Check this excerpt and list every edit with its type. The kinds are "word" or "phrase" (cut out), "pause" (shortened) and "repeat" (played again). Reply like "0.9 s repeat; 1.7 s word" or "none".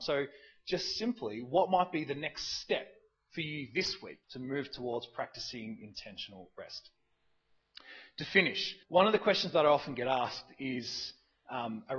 4.2 s pause; 8.8 s pause